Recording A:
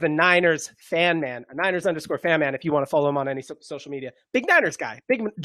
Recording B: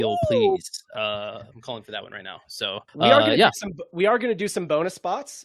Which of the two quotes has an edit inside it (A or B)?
B